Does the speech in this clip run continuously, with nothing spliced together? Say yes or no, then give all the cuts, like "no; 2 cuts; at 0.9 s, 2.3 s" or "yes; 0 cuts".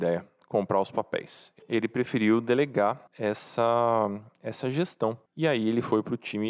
no; 3 cuts; at 1.6 s, 3.1 s, 5.3 s